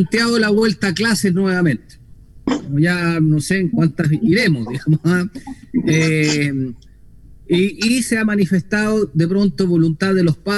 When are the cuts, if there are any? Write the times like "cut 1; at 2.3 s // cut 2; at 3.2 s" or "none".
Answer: cut 1; at 3.7 s

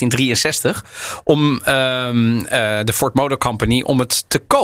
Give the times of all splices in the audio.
none

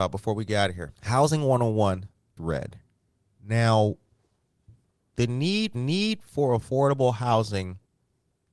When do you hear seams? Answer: cut 1; at 0.9 s // cut 2; at 2.4 s // cut 3; at 5.1 s // cut 4; at 5.7 s

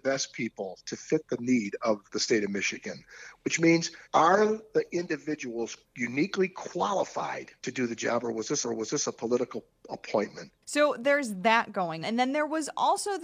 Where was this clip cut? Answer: cut 1; at 2.1 s // cut 2; at 4.0 s // cut 3; at 5.9 s // cut 4; at 7.6 s // cut 5; at 8.6 s // cut 6; at 12.0 s

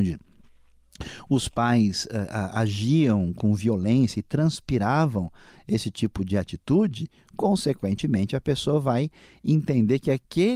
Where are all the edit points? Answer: none

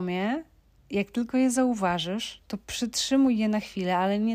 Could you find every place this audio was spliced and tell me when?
cut 1; at 2.6 s

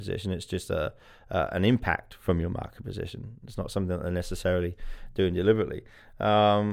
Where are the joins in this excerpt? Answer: none

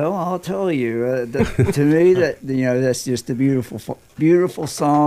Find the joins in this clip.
none

